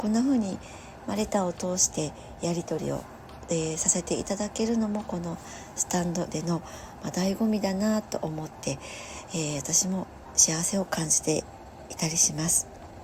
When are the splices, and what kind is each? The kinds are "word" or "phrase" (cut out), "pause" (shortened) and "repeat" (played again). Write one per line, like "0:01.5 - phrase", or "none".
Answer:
0:06.3 - word